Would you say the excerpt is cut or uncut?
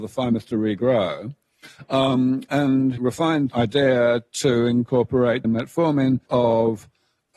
cut